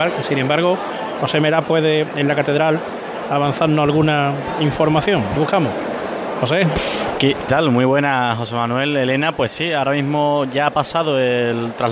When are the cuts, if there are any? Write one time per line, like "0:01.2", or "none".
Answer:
0:05.4
0:07.5

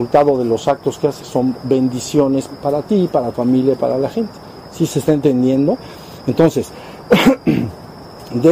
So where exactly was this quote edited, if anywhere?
0:01.2
0:02.5
0:03.3

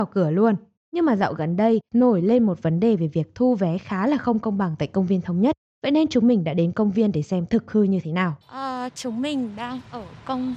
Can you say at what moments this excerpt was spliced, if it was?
0:08.4

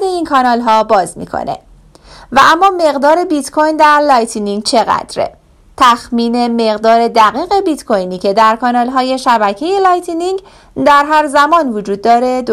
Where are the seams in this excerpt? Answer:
none

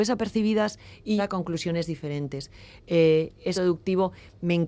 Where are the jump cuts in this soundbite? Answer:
0:01.2
0:03.5

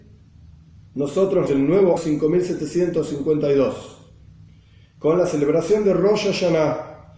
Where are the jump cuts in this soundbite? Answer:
0:01.5
0:02.0

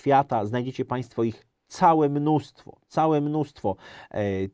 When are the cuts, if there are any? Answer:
none

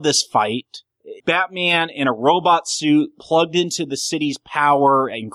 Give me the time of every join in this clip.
0:01.2

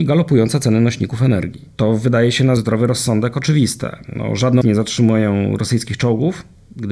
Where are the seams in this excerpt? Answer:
0:01.7
0:02.6
0:04.6

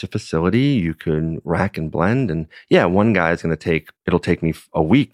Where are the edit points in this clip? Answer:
0:04.0

